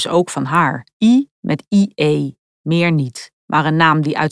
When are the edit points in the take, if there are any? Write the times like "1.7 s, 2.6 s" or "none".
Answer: 0.9 s, 3.4 s